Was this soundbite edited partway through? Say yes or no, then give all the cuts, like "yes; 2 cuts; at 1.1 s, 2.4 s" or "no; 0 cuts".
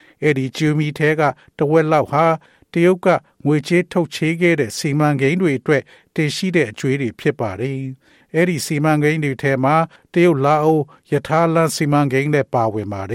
no; 0 cuts